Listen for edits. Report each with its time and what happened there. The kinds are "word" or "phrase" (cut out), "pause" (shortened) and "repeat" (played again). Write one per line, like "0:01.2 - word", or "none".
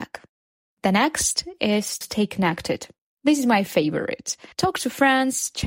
0:02.0 - word
0:04.5 - pause